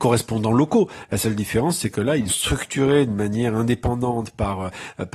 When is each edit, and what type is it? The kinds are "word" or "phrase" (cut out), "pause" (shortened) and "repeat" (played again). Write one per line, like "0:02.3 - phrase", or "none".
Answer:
0:02.3 - word